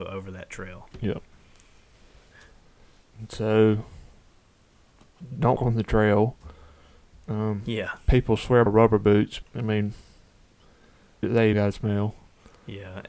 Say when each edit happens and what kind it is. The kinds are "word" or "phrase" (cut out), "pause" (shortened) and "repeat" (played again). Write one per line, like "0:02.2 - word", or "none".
0:05.6 - word
0:08.7 - word
0:09.4 - word
0:11.2 - word
0:11.5 - word